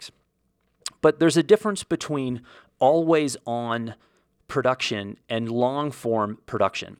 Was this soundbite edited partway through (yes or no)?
yes